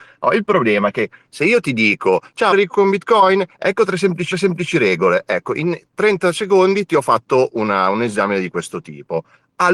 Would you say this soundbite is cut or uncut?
cut